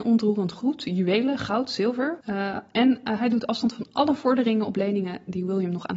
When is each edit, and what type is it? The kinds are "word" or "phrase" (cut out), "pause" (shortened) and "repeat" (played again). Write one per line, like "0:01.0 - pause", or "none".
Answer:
0:02.2 - pause